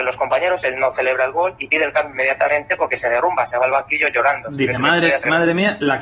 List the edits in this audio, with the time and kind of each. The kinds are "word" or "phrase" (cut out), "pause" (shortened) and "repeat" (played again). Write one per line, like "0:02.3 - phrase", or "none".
none